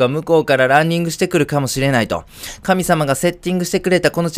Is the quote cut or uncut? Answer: uncut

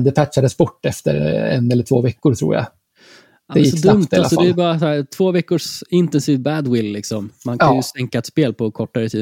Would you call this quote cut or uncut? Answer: uncut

